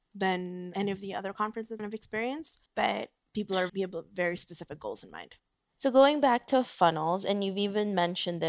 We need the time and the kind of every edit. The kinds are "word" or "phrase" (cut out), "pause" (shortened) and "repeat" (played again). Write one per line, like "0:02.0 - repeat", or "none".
0:01.8 - phrase
0:02.7 - pause
0:03.7 - word